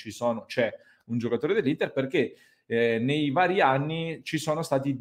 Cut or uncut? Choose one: uncut